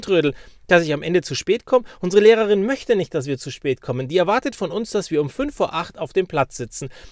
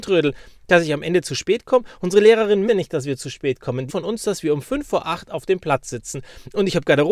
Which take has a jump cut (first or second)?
second